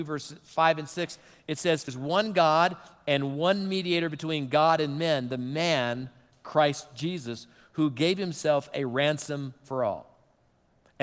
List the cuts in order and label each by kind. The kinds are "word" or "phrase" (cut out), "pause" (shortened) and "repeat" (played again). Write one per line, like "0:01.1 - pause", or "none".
0:01.9 - word